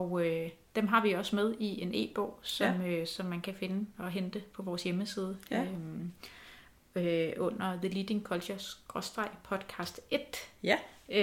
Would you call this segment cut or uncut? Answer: uncut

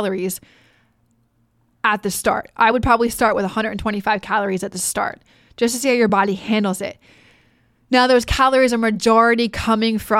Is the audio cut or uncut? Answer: uncut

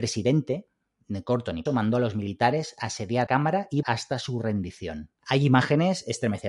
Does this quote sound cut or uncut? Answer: cut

